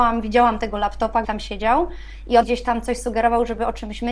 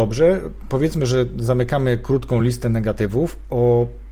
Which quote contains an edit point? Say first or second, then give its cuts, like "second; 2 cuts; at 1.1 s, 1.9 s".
first; 2 cuts; at 1.2 s, 2.4 s